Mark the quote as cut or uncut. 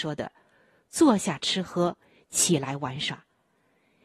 uncut